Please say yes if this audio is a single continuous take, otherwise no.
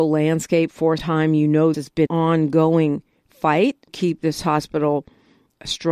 no